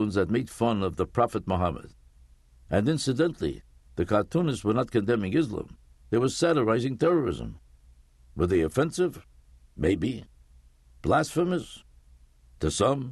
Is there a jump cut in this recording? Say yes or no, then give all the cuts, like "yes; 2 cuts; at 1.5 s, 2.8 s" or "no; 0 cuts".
no; 0 cuts